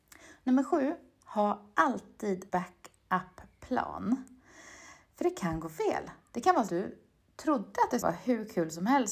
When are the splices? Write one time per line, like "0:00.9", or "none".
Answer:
0:02.5
0:06.7
0:08.0